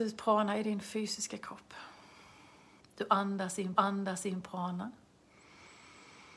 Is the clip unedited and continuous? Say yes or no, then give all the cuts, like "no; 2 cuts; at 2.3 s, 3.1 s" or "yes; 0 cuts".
no; 2 cuts; at 2.8 s, 3.8 s